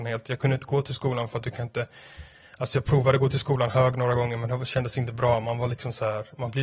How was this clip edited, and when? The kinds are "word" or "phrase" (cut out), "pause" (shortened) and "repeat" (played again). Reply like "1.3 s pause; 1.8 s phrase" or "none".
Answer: none